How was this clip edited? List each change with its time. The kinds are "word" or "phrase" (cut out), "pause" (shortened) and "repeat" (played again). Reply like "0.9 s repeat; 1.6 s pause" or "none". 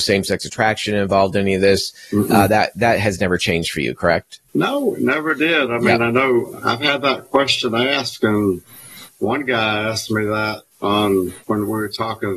4.5 s pause; 10.7 s pause; 11.4 s pause